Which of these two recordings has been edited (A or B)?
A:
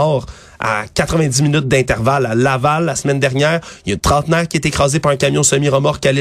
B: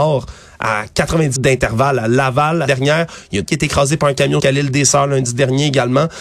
B